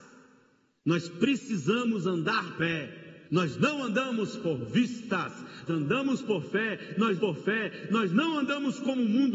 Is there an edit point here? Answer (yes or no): yes